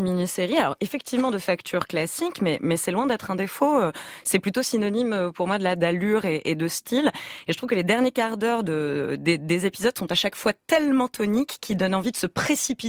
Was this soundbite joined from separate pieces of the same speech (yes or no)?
no